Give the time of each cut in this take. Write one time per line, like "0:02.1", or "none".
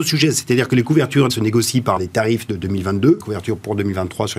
0:01.3
0:02.0
0:03.2